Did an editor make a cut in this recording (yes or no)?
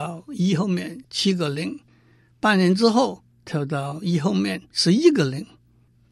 no